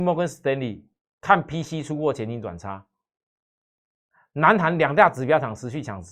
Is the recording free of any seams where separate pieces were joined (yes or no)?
yes